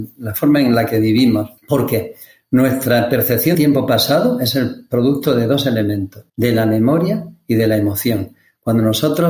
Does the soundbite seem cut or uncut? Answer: cut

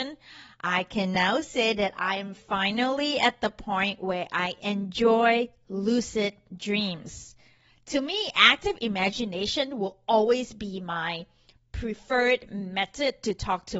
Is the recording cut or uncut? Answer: uncut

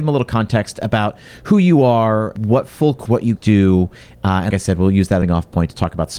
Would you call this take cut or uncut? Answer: cut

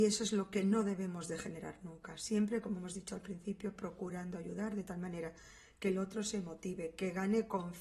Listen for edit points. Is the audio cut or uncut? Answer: uncut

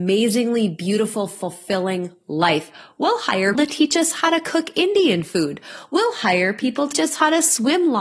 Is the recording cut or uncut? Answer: cut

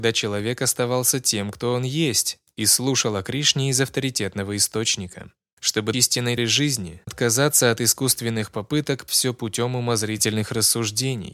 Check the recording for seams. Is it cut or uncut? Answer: cut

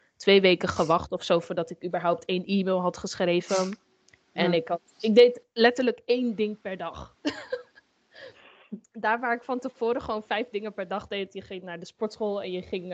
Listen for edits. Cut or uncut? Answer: uncut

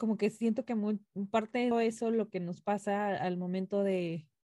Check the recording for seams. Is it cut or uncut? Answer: cut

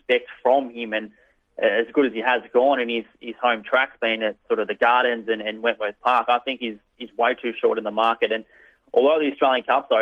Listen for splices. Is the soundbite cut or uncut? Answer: uncut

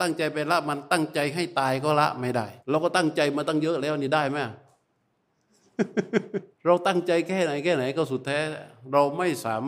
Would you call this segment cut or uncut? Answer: cut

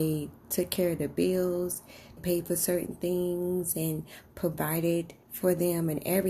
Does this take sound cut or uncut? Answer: cut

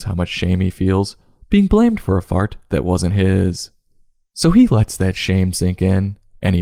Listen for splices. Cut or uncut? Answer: uncut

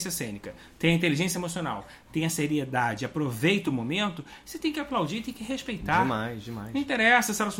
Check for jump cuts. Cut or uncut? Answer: uncut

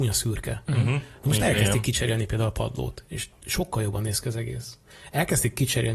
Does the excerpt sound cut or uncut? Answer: uncut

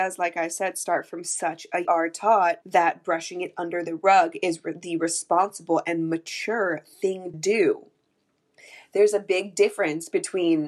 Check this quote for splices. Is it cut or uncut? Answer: cut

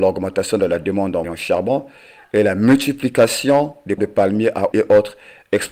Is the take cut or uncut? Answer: cut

